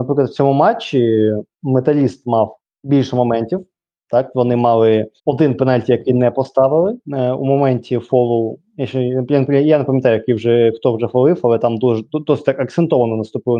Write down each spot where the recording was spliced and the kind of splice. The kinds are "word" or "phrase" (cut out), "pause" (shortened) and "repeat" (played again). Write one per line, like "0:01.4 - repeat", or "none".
0:01.5 - pause
0:02.6 - pause
0:05.2 - pause
0:07.0 - pause